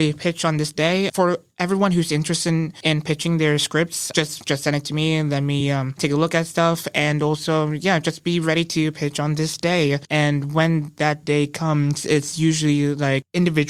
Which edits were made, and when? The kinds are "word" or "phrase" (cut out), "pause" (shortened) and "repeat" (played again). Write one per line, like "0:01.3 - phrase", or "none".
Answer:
none